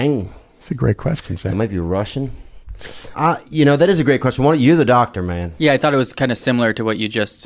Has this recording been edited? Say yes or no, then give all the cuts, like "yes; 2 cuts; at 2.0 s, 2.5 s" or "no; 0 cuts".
yes; 2 cuts; at 1.5 s, 3.1 s